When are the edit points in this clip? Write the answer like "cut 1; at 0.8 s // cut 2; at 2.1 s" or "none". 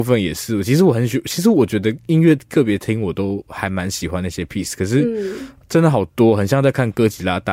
none